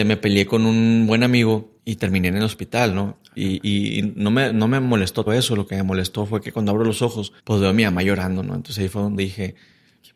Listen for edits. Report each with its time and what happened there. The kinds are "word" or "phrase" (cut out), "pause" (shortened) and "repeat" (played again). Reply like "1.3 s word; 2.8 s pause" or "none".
1.8 s pause; 5.3 s word; 7.4 s pause